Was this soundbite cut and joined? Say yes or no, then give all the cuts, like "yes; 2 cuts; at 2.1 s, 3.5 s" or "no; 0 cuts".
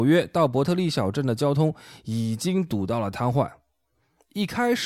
no; 0 cuts